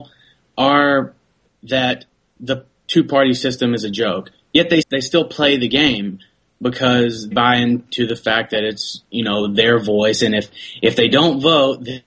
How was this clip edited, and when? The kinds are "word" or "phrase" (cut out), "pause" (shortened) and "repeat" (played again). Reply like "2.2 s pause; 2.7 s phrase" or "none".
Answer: 1.5 s word; 4.8 s word; 7.3 s word